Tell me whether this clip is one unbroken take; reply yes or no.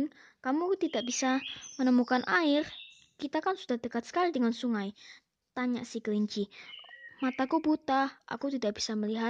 yes